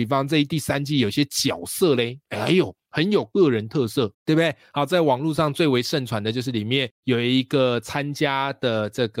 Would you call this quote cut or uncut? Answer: cut